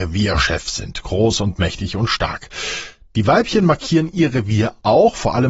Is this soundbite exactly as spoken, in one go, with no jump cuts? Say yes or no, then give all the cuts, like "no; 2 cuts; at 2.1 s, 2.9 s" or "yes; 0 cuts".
yes; 0 cuts